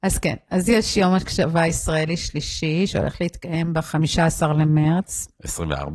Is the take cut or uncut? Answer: uncut